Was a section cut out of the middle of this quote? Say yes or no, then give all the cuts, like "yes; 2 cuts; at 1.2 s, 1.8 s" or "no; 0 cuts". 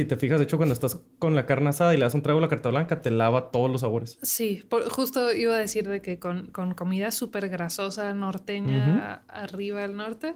no; 0 cuts